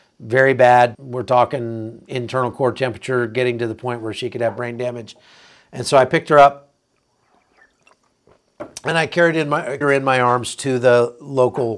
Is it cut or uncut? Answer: cut